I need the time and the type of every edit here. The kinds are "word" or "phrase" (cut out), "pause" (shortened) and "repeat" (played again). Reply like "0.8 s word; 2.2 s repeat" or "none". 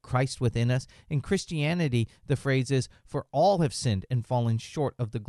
none